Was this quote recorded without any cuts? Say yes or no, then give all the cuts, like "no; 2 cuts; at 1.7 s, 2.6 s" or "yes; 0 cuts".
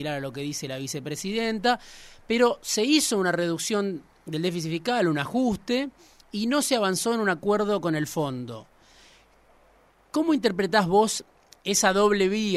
yes; 0 cuts